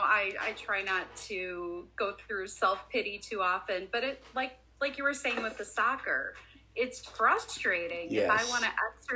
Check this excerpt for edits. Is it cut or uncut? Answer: uncut